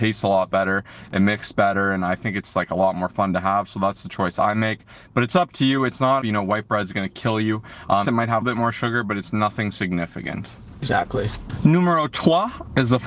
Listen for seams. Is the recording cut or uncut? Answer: cut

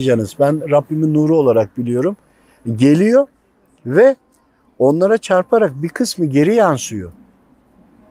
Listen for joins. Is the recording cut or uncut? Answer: uncut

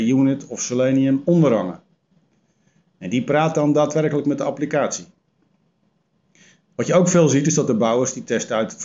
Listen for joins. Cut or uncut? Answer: uncut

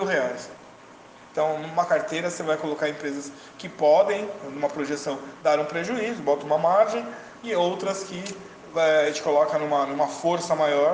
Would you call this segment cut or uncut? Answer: uncut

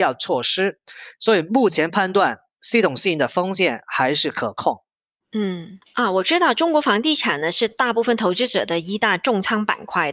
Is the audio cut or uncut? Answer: uncut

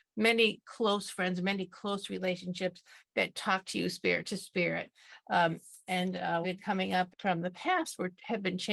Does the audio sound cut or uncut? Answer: cut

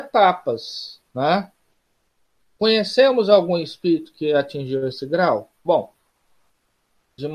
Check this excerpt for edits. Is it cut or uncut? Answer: cut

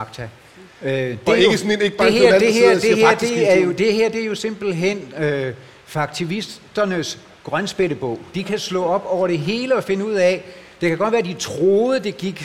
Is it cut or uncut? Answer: uncut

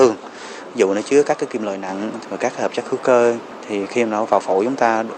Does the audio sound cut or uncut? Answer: uncut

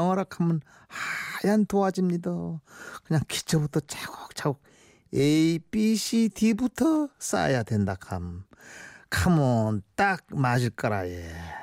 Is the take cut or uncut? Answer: uncut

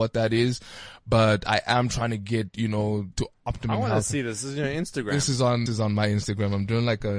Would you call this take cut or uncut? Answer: cut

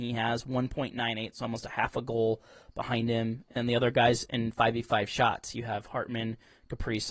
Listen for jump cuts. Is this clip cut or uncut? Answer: uncut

